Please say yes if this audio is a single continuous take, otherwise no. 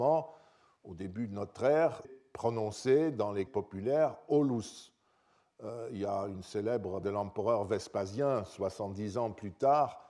no